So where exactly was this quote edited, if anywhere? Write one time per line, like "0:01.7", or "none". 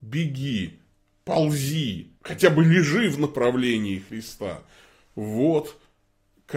0:02.2

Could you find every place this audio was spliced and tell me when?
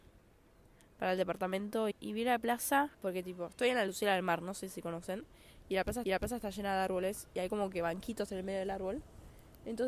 0:01.9
0:02.9
0:06.0

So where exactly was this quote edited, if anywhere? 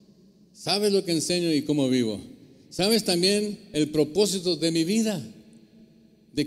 none

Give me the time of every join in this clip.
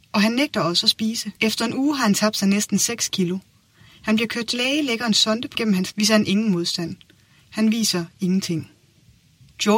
0:01.4
0:04.5
0:05.6
0:05.9

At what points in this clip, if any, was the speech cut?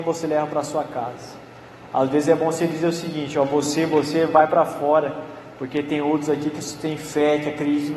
none

